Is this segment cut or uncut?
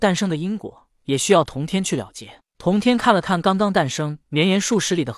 cut